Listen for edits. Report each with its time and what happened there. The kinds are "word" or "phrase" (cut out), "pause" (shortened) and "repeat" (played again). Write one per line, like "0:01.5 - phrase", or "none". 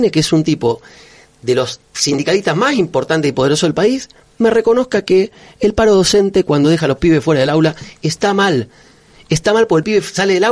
none